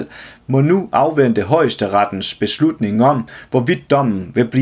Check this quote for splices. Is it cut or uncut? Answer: uncut